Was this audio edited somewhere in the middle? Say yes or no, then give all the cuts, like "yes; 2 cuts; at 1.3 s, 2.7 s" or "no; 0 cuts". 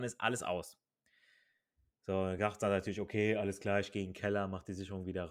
no; 0 cuts